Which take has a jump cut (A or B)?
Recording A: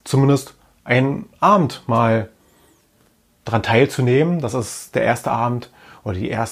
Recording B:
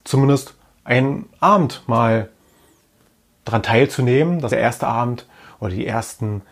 B